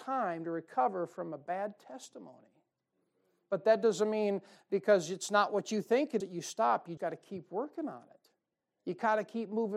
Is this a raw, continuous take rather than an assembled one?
no; 2 cuts; at 6.2 s, 7.0 s

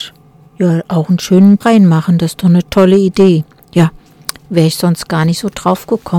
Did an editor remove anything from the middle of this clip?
yes; 1 cut; at 1.6 s

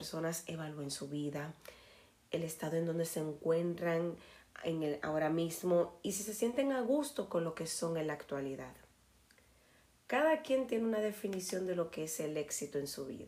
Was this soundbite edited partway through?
no; 0 cuts

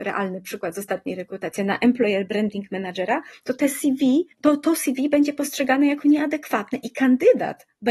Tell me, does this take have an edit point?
yes; 1 cut; at 4.3 s

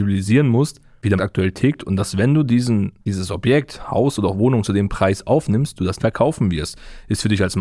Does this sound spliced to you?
yes; 3 cuts; at 1.2 s, 3.0 s, 6.0 s

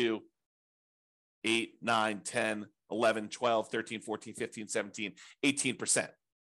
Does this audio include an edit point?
yes; 1 cut; at 4.7 s

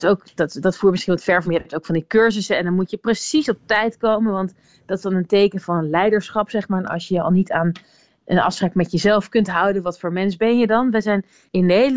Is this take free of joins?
no; 1 cut; at 1.5 s

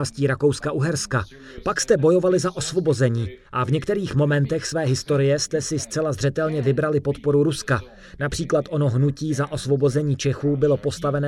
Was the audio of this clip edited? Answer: no; 0 cuts

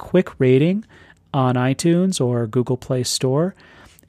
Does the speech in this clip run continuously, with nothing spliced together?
yes; 0 cuts

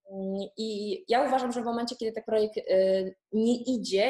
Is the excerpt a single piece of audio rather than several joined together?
no; 1 cut; at 2.2 s

